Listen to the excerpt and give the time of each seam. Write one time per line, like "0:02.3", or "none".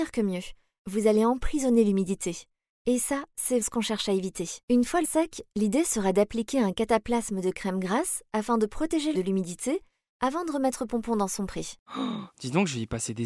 0:03.6
0:04.6
0:05.0
0:09.1